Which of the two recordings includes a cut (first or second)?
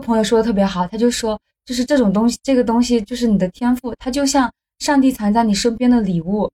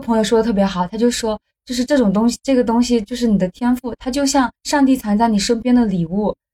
second